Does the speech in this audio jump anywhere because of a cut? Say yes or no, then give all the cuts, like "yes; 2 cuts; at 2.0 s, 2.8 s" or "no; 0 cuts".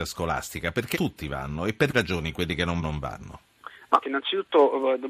yes; 4 cuts; at 0.9 s, 1.9 s, 2.8 s, 4.0 s